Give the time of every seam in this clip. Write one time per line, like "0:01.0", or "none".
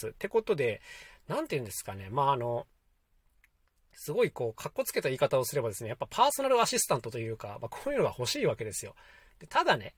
none